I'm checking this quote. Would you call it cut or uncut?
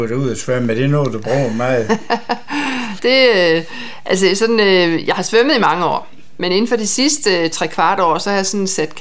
cut